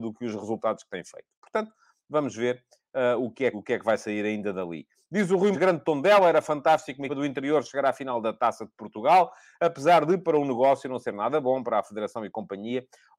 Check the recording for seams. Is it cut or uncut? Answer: cut